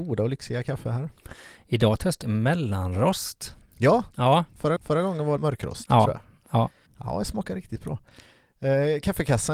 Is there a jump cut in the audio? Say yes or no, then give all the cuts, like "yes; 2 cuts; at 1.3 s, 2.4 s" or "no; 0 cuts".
yes; 4 cuts; at 2.2 s, 4.8 s, 5.4 s, 6.9 s